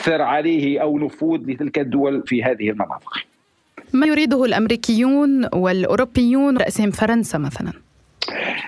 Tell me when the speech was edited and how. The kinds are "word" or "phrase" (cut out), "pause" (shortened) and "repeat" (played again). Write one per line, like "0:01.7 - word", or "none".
0:01.0 - word
0:02.3 - word
0:04.0 - word
0:06.6 - word